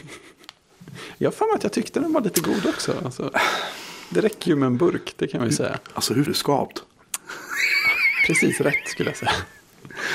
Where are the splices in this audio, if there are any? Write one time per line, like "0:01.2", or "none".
0:06.3